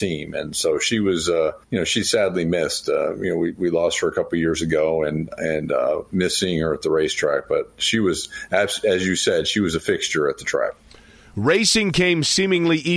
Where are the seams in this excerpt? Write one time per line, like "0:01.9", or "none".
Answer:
0:01.6